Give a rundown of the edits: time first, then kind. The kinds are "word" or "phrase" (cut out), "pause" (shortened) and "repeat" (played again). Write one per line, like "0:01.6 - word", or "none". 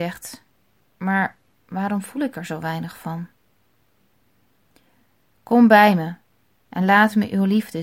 none